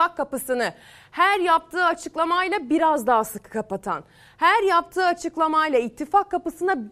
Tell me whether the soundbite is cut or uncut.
uncut